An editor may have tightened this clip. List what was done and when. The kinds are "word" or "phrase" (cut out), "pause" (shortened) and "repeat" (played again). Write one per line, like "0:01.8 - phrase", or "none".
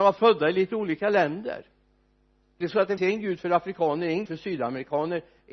0:02.6 - word
0:03.0 - word
0:04.3 - word